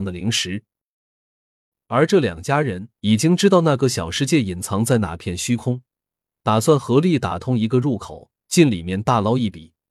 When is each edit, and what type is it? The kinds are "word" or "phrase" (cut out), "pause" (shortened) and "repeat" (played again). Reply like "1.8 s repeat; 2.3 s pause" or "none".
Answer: 2.9 s pause; 8.4 s pause